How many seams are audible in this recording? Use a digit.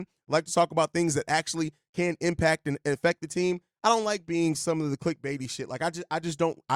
0